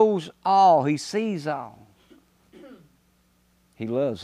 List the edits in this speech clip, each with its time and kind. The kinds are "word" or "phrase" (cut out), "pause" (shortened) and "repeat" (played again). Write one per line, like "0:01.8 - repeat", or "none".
none

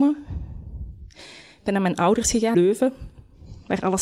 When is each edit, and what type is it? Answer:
0:02.5 - word

